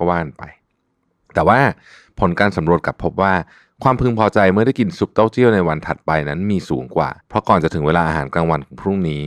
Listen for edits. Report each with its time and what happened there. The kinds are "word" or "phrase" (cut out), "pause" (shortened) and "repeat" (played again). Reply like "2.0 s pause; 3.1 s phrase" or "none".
7.2 s pause